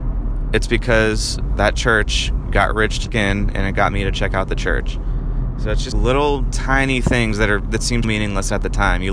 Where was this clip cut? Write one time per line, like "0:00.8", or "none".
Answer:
0:03.1
0:05.9
0:08.0